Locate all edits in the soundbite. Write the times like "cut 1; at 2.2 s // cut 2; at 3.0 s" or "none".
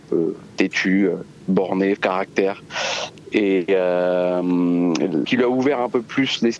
cut 1; at 2.0 s // cut 2; at 5.2 s